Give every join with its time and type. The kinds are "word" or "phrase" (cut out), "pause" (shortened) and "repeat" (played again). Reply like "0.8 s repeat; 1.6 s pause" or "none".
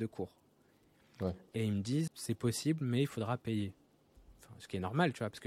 2.1 s word